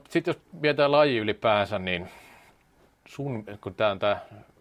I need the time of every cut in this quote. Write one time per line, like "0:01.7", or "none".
0:02.9